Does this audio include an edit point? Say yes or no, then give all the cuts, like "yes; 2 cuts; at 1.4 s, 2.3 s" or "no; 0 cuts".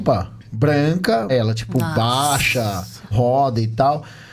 yes; 2 cuts; at 1.3 s, 3.1 s